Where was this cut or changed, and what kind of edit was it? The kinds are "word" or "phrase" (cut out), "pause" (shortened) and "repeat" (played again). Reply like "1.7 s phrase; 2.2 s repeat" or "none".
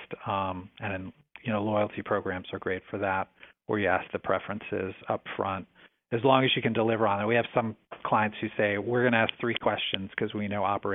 none